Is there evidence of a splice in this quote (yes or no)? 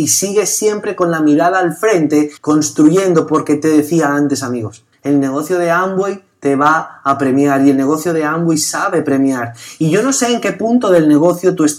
yes